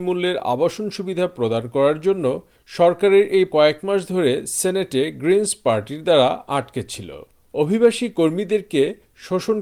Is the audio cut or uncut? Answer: cut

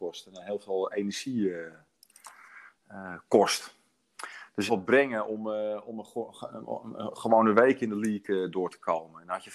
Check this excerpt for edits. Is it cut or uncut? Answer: cut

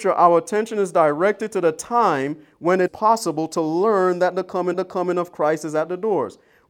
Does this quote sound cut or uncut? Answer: cut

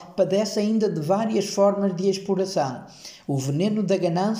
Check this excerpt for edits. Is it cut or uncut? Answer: uncut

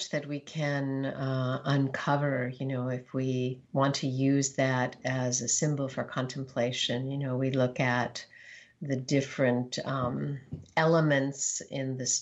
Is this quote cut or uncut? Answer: cut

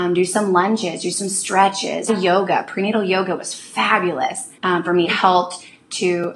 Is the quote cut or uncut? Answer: cut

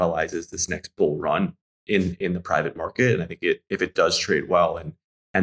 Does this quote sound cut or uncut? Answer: uncut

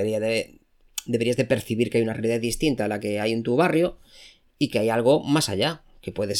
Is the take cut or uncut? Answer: uncut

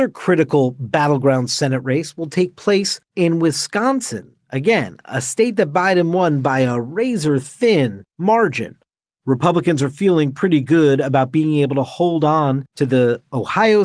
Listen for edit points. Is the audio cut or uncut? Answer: uncut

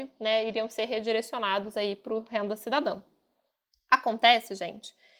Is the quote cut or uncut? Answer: uncut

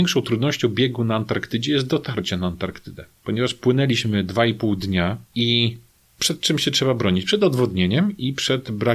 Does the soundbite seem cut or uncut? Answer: uncut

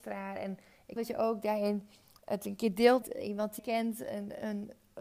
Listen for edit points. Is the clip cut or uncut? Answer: cut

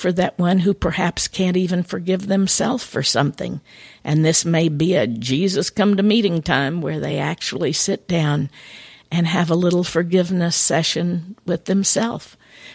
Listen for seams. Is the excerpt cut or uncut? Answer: uncut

